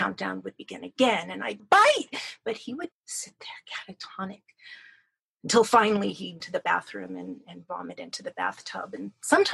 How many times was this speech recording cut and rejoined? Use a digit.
3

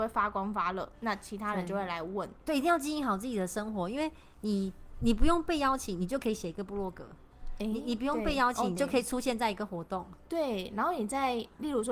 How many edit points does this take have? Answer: 1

